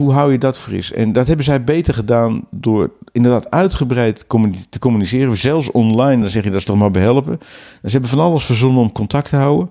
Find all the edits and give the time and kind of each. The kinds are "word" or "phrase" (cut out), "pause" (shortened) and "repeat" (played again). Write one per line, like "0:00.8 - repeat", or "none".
none